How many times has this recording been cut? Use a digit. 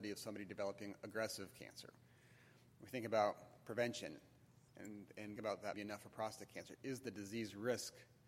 3